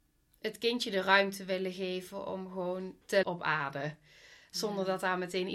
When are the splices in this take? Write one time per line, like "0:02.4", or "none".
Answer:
0:03.2